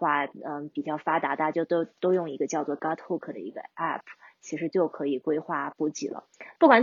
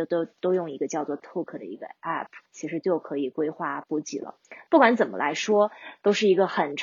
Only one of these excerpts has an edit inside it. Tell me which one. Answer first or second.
second